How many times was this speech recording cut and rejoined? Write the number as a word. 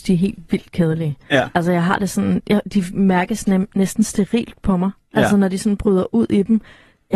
zero